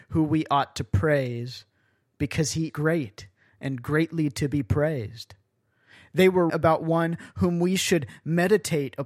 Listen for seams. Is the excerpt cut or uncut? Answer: cut